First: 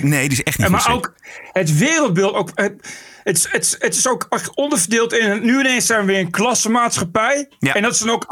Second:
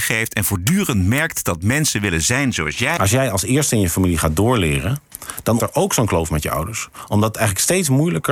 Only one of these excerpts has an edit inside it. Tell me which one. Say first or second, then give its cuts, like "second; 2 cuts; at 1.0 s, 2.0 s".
second; 1 cut; at 5.6 s